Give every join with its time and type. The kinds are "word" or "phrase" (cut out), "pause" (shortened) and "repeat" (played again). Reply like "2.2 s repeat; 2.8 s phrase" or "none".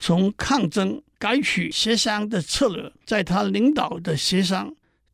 3.0 s pause